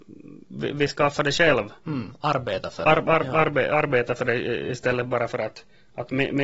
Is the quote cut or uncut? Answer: uncut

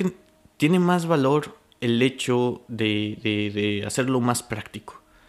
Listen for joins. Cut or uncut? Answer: uncut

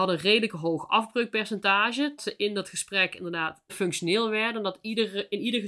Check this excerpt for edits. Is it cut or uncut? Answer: cut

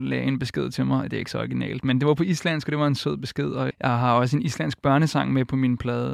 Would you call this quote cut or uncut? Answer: cut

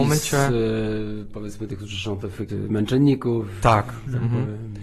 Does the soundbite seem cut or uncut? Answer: cut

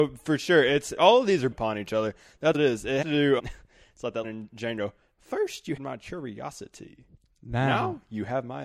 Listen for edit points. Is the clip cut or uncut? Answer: cut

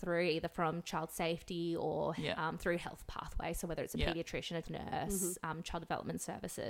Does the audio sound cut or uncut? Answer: cut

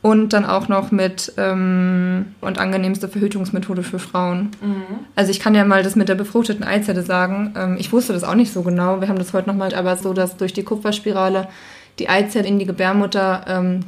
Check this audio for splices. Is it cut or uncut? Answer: cut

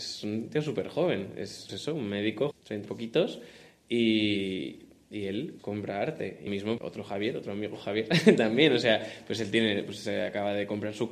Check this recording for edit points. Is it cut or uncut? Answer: cut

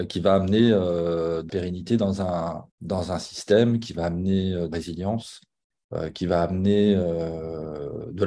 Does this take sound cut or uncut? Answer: cut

